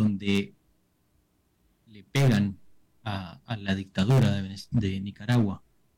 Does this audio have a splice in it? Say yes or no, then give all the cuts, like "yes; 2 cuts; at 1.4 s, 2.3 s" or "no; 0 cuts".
no; 0 cuts